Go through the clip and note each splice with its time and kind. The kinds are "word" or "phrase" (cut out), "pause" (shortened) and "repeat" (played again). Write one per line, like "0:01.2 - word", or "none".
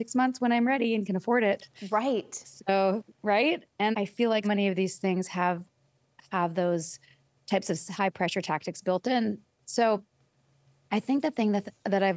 0:03.9 - word
0:04.4 - word
0:08.0 - word